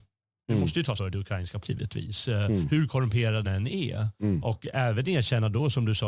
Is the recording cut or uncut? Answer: cut